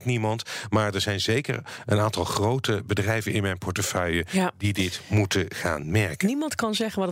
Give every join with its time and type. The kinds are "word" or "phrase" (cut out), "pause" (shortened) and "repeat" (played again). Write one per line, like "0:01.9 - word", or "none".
none